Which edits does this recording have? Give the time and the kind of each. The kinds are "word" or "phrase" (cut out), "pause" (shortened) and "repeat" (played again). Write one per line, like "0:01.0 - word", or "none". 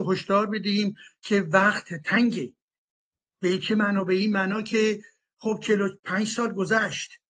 0:06.0 - pause